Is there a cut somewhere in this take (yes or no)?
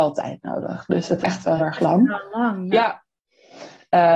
yes